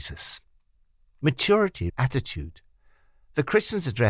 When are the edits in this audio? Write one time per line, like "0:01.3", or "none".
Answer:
0:01.9